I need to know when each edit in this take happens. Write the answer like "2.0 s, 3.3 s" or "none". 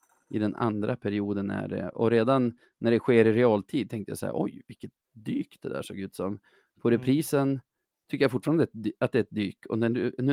none

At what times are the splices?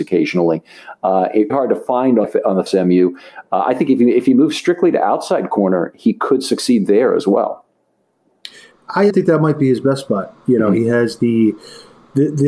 1.5 s, 2.2 s, 2.7 s, 9.1 s

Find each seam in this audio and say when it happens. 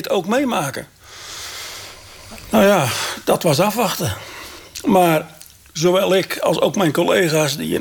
none

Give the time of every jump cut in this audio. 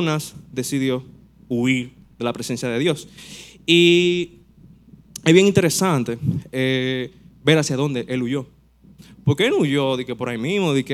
none

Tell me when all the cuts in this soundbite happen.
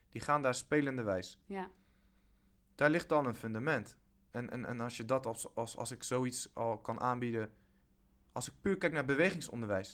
none

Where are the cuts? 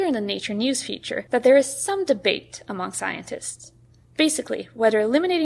none

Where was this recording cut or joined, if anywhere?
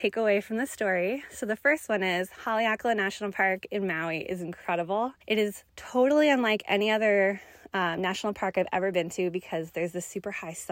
5.2 s, 5.7 s

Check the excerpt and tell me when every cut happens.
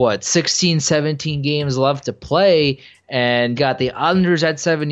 3.6 s

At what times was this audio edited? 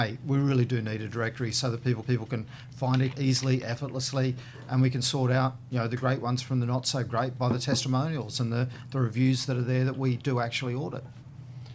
2.0 s, 3.1 s

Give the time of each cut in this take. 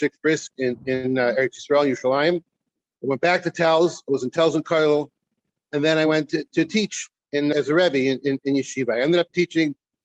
none

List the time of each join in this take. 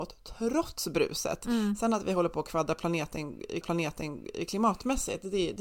3.6 s

